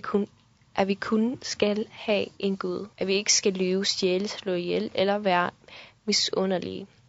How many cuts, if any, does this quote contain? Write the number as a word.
one